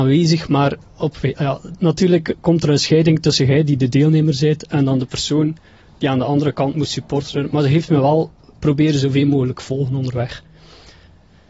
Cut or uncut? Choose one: uncut